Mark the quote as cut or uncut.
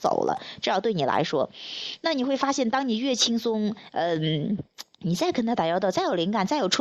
cut